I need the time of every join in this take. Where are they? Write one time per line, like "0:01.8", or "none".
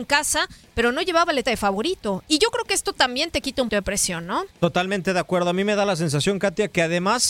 0:01.4
0:03.7
0:04.5